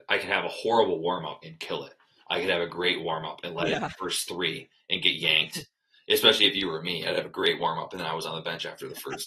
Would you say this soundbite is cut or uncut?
uncut